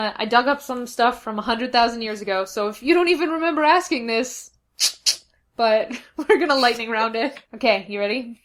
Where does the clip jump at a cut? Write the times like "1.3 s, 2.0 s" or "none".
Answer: 7.4 s